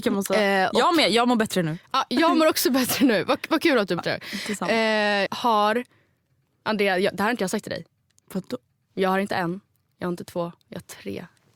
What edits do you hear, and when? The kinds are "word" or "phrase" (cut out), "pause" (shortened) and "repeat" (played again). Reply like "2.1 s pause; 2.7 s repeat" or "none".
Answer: 4.0 s word; 5.3 s phrase